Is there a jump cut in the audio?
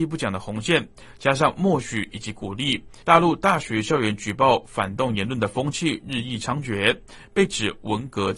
yes; 1 cut; at 3.0 s

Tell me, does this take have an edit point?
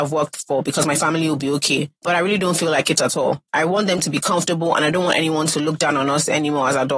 yes; 2 cuts; at 2.0 s, 3.5 s

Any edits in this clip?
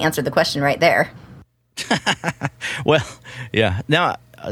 no; 0 cuts

